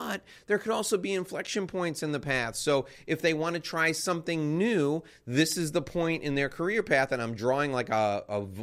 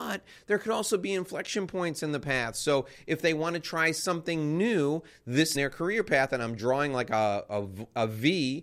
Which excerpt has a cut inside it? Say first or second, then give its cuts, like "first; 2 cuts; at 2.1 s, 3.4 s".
second; 1 cut; at 5.5 s